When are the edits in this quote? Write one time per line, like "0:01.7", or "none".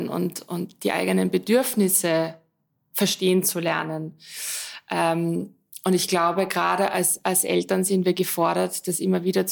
none